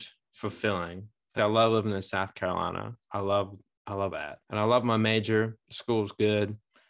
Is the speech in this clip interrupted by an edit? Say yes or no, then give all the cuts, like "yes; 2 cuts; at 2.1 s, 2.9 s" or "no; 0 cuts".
yes; 3 cuts; at 1.4 s, 4.1 s, 4.4 s